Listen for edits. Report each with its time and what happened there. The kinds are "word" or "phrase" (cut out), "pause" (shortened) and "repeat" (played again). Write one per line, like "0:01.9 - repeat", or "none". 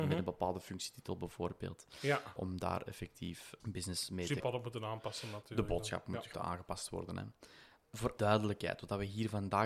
0:04.4 - word
0:06.3 - word
0:08.2 - word